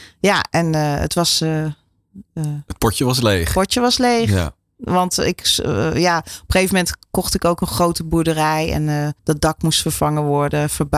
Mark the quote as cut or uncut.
cut